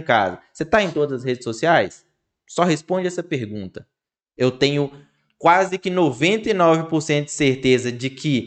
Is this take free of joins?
yes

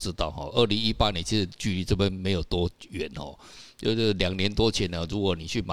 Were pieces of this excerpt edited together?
no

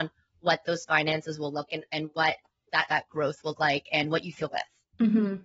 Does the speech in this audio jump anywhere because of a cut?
yes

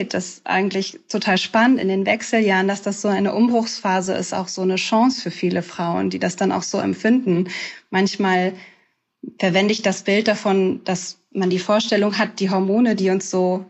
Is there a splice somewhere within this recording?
no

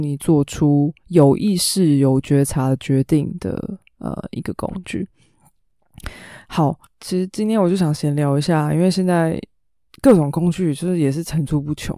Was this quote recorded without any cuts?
yes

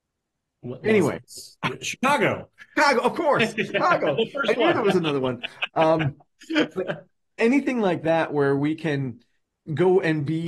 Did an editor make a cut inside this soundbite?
yes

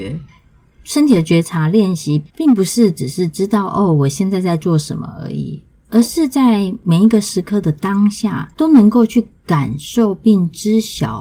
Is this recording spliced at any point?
yes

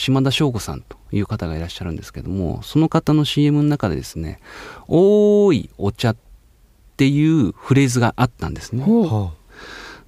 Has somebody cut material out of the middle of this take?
no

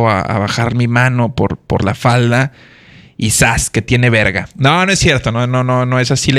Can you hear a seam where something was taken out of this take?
no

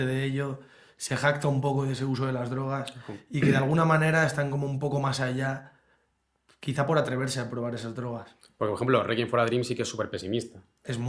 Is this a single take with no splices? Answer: yes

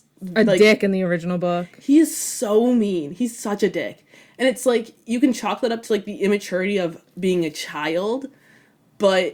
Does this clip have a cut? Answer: no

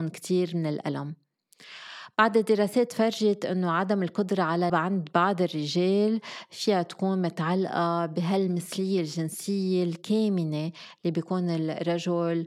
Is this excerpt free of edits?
no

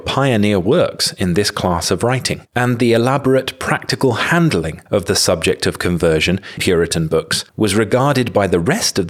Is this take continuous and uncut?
no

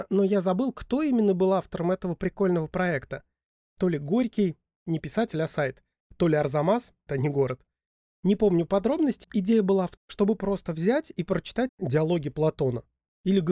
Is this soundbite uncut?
no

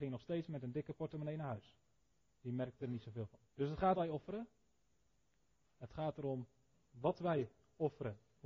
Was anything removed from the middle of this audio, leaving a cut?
yes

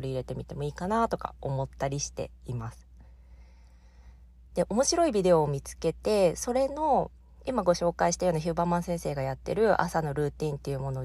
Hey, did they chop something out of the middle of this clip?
no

